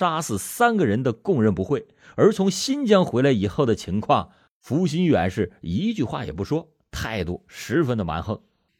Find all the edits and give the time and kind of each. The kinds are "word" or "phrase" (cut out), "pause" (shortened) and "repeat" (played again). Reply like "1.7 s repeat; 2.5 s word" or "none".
none